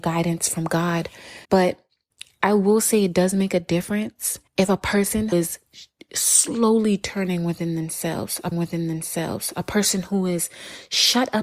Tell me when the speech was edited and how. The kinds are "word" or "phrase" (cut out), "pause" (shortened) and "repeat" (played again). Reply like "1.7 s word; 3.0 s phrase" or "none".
1.4 s pause; 4.5 s pause; 5.3 s word; 8.5 s repeat